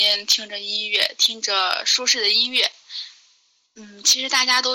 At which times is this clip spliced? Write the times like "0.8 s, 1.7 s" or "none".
none